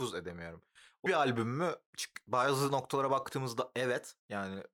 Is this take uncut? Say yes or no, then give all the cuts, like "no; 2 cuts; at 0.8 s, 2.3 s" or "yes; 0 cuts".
no; 1 cut; at 1.1 s